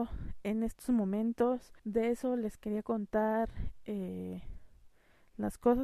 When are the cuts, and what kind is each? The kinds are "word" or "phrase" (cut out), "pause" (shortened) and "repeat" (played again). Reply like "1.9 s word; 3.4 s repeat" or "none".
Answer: 1.8 s pause